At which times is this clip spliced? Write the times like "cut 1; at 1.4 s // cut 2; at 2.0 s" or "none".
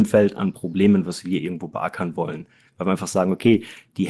none